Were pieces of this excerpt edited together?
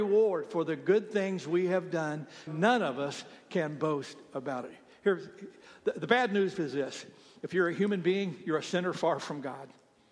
yes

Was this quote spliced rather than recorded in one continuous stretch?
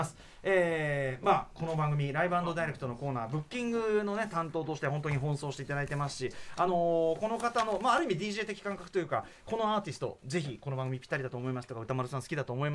no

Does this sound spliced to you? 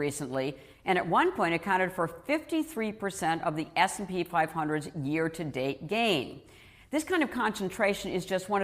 no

